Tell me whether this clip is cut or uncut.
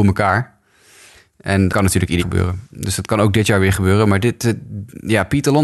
cut